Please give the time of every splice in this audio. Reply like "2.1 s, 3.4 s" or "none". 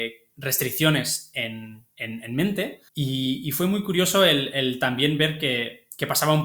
1.9 s, 2.9 s